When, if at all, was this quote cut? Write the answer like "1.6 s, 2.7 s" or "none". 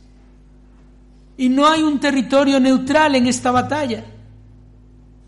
none